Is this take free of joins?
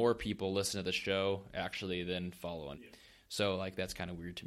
no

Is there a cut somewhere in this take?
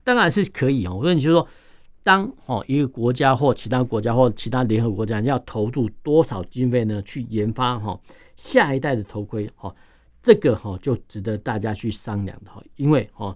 no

